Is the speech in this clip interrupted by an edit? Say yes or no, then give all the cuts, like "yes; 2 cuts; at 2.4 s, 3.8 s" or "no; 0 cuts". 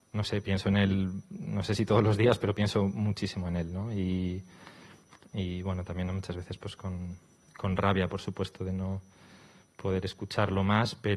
no; 0 cuts